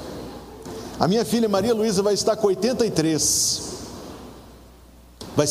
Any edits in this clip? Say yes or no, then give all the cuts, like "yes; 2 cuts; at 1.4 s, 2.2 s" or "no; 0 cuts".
no; 0 cuts